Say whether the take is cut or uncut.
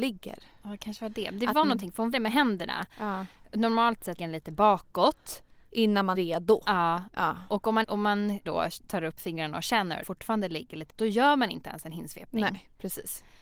cut